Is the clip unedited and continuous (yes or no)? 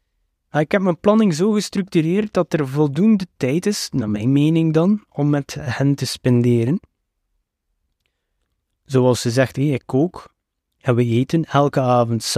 yes